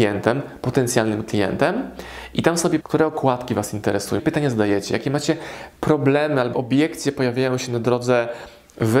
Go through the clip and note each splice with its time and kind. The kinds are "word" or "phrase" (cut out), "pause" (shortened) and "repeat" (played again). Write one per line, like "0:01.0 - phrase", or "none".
0:02.8 - word
0:04.2 - word
0:06.5 - word

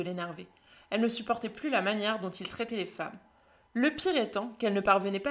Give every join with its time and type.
none

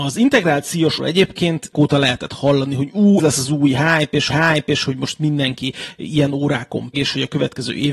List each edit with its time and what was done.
0:01.0 - word
0:01.7 - word
0:03.2 - word
0:04.3 - repeat
0:06.9 - word

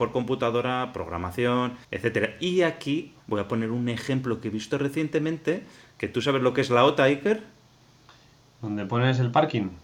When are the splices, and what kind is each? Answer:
0:01.8 - pause
0:03.2 - pause

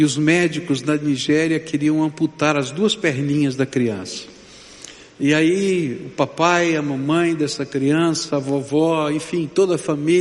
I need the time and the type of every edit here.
none

